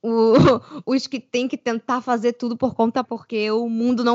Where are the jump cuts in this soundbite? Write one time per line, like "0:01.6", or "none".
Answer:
0:03.0

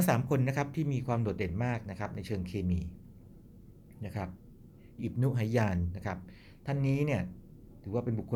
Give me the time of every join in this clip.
0:05.0

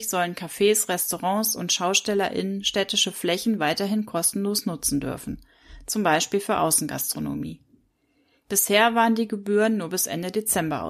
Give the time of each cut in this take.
none

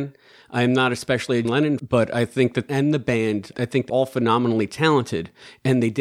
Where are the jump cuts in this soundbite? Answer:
0:01.4
0:01.8
0:02.7
0:03.5
0:03.9

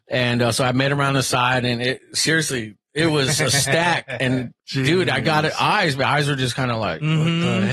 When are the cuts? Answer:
0:04.6

